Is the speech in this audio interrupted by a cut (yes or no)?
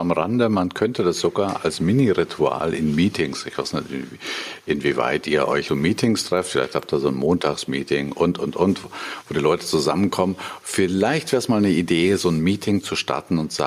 yes